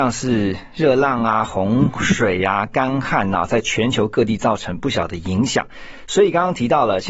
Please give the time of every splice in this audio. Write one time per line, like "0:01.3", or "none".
none